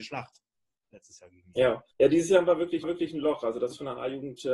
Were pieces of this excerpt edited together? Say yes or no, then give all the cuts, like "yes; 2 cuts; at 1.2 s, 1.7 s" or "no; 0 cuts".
yes; 2 cuts; at 1.9 s, 2.8 s